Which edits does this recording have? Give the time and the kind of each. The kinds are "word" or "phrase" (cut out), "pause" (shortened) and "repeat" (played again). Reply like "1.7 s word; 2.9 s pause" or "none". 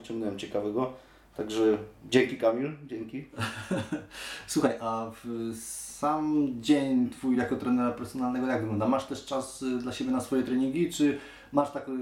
none

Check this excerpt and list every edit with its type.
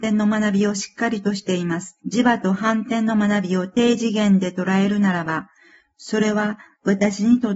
2.0 s pause

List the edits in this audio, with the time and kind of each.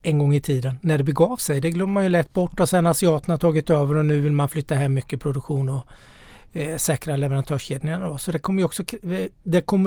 none

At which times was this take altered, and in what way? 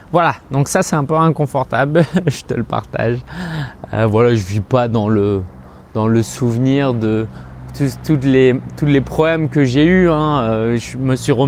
none

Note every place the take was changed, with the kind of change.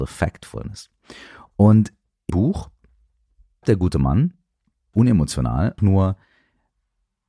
2.3 s word; 3.6 s word; 4.9 s word; 5.8 s word

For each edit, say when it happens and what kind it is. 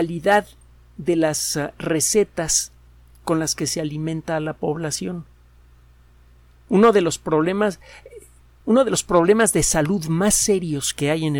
none

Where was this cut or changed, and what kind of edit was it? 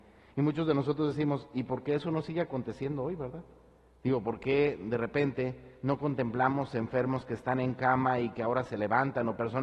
none

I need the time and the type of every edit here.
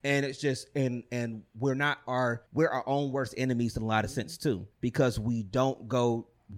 2.5 s pause; 4.7 s pause

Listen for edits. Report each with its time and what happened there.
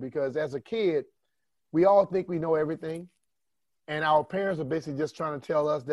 none

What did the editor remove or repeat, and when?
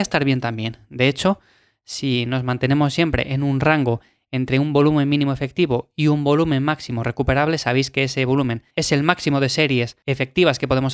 8.7 s pause

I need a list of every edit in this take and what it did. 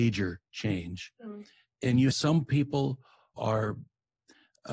2.1 s word; 3.4 s word

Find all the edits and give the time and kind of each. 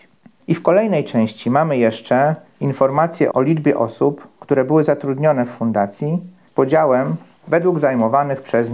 3.3 s word

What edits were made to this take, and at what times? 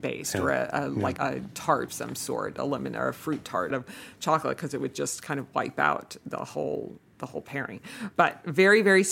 1.2 s word; 1.9 s word; 3.7 s phrase

